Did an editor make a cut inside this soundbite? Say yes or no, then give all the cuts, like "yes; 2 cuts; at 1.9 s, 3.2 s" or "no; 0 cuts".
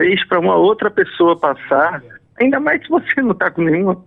no; 0 cuts